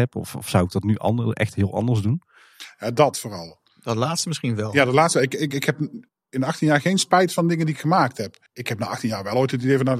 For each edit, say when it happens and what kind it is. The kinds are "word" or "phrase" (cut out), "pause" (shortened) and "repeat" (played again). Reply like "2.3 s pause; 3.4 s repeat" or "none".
6.1 s pause; 8.5 s pause